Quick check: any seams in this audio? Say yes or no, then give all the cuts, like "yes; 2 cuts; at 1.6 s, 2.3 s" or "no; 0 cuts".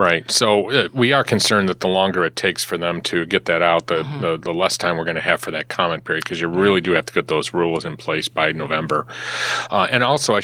no; 0 cuts